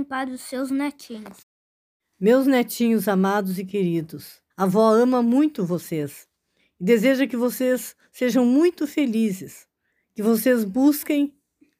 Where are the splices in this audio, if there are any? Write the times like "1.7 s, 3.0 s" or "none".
4.5 s, 9.9 s